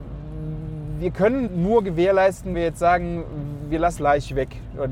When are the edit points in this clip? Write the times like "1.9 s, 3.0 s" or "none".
1.5 s, 2.5 s, 4.0 s